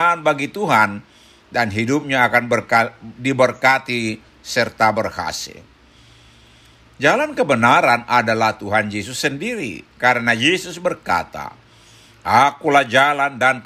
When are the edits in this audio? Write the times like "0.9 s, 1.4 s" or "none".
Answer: none